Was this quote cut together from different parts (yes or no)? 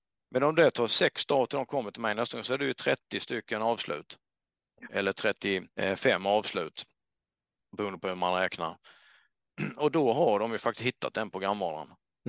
yes